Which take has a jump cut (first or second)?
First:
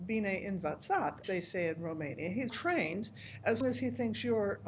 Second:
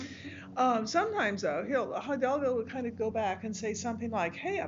first